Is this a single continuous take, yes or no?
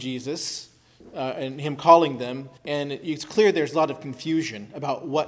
no